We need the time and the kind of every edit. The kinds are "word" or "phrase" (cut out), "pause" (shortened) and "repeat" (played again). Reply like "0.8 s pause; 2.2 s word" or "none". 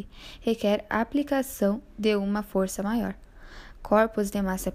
none